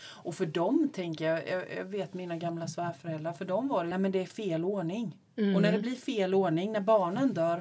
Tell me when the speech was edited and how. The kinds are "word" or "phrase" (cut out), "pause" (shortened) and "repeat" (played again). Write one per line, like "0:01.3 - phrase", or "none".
0:03.9 - phrase